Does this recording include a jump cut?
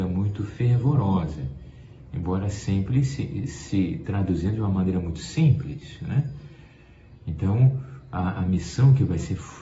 no; 0 cuts

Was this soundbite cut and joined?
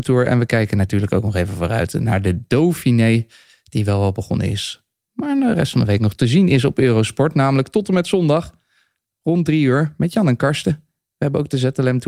no; 0 cuts

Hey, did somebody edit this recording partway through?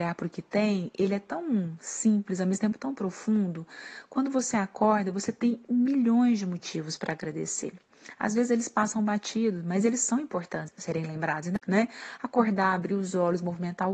yes; 2 cuts; at 10.7 s, 11.6 s

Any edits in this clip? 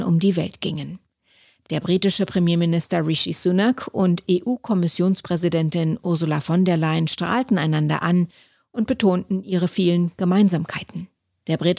no; 0 cuts

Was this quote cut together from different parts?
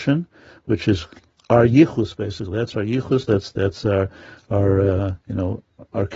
no; 0 cuts

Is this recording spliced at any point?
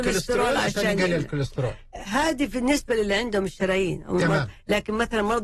no; 0 cuts

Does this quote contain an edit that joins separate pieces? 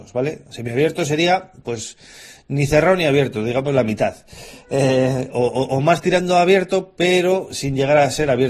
no; 0 cuts

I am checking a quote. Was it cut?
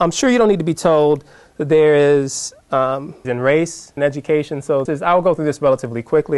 yes; 3 cuts; at 3.2 s, 4.0 s, 4.9 s

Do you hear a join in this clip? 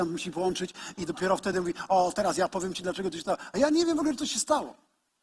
no; 0 cuts

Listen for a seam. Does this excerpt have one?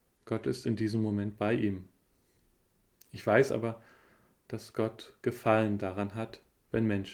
no; 0 cuts

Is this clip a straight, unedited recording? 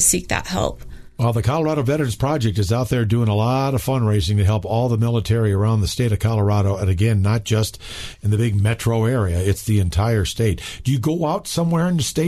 yes; 0 cuts

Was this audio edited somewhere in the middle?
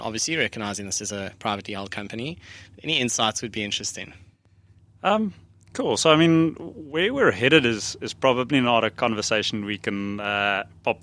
no; 0 cuts

